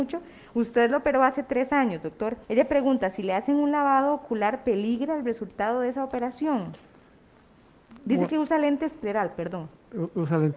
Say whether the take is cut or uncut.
cut